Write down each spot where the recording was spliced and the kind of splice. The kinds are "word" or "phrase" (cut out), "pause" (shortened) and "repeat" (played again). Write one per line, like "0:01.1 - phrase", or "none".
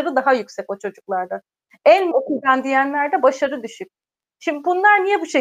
0:02.1 - word